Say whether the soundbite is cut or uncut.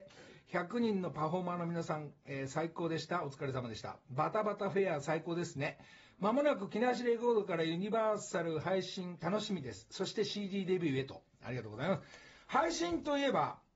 uncut